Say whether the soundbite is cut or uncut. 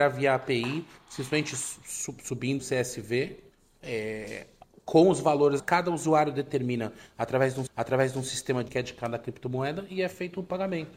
cut